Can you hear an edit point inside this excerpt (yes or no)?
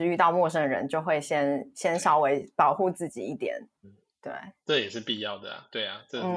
yes